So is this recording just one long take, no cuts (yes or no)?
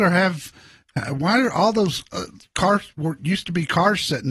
yes